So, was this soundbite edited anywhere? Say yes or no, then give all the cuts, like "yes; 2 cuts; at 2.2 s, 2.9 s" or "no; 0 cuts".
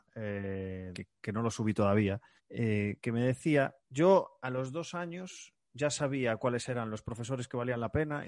yes; 3 cuts; at 0.9 s, 2.4 s, 3.8 s